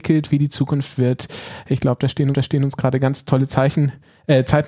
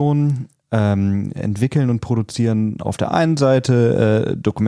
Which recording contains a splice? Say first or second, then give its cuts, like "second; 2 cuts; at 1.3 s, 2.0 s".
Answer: first; 1 cut; at 2.3 s